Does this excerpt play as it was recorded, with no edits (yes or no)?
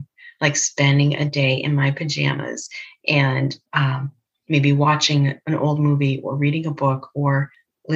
no